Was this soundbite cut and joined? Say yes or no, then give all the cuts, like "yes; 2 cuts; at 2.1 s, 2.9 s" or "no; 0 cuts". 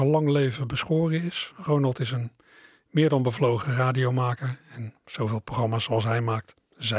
no; 0 cuts